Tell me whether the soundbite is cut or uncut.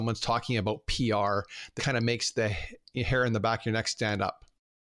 cut